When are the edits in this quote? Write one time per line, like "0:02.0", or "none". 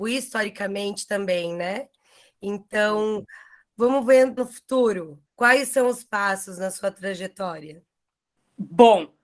0:04.4
0:05.2
0:06.1